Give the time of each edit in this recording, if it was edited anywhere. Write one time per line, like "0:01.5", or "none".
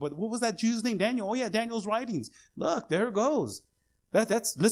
none